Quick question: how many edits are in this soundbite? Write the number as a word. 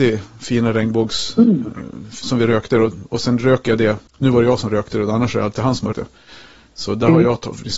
two